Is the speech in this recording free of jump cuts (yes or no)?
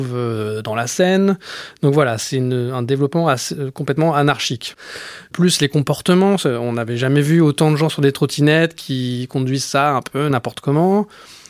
yes